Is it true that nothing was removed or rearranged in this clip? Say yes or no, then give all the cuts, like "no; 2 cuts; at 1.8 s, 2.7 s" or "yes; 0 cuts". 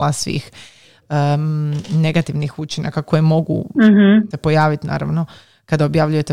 no; 1 cut; at 4.3 s